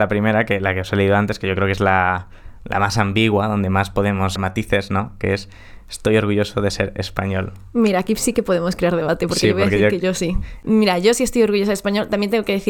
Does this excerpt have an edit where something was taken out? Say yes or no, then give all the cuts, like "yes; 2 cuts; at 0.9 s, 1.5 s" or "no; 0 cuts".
yes; 1 cut; at 4.4 s